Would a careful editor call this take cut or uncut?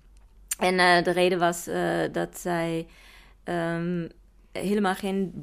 uncut